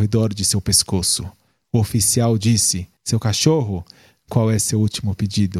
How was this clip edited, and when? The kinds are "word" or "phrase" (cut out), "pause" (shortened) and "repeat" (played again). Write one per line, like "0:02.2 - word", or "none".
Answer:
0:03.0 - pause